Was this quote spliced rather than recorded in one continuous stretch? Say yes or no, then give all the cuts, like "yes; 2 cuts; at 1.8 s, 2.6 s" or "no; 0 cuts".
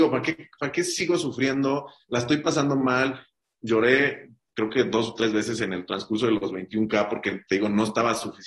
no; 0 cuts